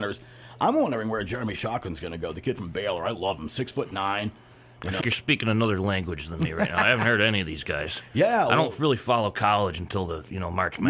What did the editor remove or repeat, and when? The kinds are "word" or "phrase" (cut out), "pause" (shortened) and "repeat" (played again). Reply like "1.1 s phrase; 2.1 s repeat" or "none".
5.0 s word